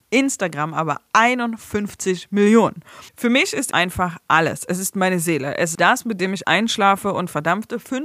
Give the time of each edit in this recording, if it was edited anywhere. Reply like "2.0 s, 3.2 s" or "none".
3.1 s, 3.7 s, 5.7 s, 6.4 s